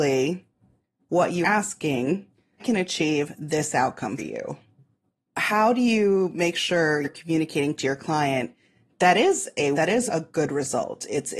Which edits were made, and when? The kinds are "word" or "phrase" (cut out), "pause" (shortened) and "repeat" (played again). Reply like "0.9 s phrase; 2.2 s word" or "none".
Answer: 1.4 s word; 2.6 s word; 4.2 s word; 7.0 s word; 7.8 s word; 8.9 s word; 9.7 s word; 10.1 s word